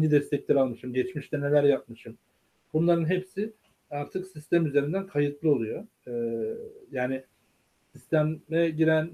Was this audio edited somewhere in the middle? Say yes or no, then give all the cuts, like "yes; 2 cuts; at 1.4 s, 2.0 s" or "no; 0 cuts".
no; 0 cuts